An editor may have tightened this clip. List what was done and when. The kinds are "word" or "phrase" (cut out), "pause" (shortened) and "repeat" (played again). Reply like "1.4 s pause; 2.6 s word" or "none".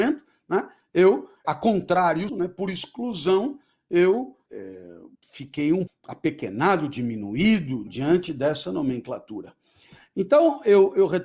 1.4 s word; 2.3 s word; 4.5 s word; 5.1 s word; 5.9 s word; 7.9 s word